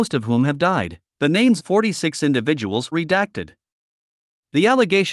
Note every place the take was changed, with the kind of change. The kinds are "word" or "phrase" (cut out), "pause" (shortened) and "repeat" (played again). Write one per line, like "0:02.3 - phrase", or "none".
0:01.1 - pause
0:01.6 - word
0:02.9 - word